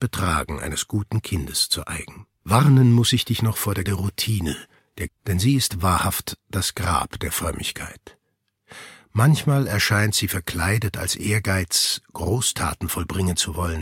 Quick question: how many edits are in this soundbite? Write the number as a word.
three